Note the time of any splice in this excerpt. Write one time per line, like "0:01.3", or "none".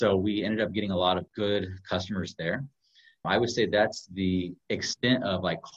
0:01.3
0:03.2
0:04.6